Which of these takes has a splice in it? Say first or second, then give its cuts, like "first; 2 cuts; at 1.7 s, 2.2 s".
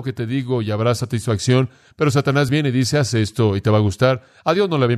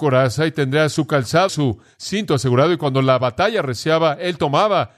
second; 1 cut; at 1.5 s